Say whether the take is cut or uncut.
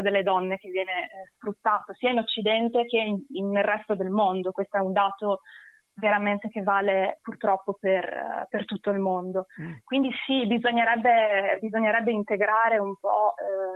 uncut